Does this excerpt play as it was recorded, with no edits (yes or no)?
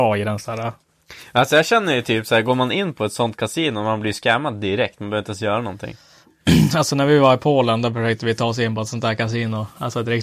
yes